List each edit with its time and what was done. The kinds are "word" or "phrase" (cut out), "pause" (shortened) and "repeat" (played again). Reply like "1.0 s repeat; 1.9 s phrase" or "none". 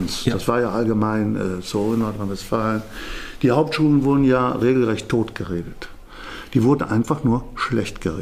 none